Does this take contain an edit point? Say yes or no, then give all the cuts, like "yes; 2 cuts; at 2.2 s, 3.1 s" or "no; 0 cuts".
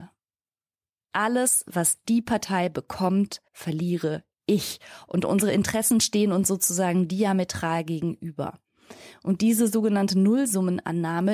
yes; 1 cut; at 3.5 s